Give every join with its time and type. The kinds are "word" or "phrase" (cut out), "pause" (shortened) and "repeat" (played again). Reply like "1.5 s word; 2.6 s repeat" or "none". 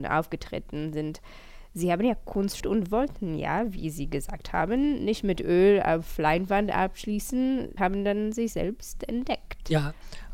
2.6 s word; 7.8 s word